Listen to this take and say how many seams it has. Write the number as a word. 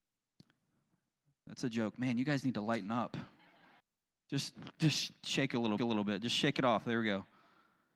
two